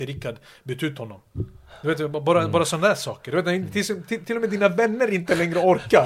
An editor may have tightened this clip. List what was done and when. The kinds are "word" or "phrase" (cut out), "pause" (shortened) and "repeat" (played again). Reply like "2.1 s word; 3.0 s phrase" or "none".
none